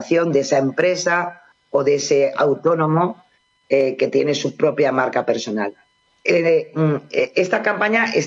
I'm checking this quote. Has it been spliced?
yes; 1 cut; at 6.1 s

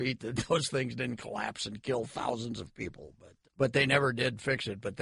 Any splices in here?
yes; 1 cut; at 3.4 s

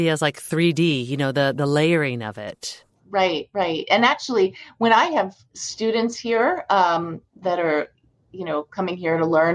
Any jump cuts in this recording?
no; 0 cuts

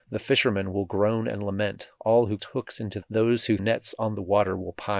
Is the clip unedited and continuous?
no; 3 cuts; at 2.4 s, 3.0 s, 3.6 s

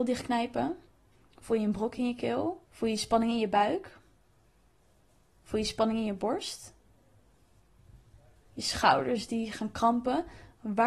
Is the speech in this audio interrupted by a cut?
yes; 1 cut; at 2.7 s

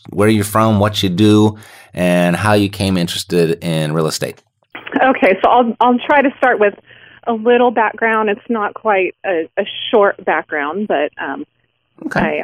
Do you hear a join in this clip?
no; 0 cuts

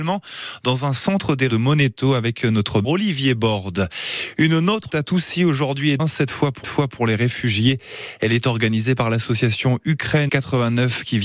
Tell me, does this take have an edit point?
yes; 6 cuts; at 1.5 s, 2.8 s, 4.9 s, 6.0 s, 6.6 s, 10.3 s

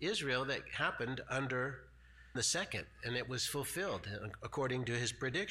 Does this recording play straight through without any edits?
no; 1 cut; at 2.3 s

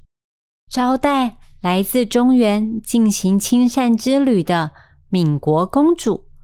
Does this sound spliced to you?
no; 0 cuts

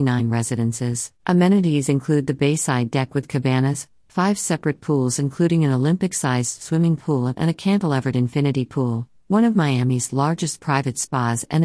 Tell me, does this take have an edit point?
yes; 1 cut; at 1.2 s

